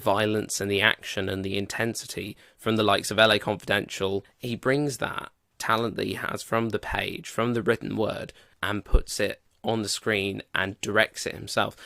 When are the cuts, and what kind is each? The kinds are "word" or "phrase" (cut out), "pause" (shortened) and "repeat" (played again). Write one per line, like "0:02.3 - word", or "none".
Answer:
none